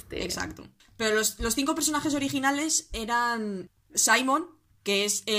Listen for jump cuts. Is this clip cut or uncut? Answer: uncut